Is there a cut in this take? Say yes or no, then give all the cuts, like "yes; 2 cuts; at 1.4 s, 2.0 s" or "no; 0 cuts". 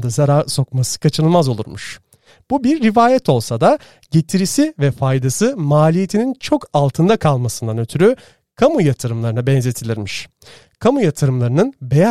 no; 0 cuts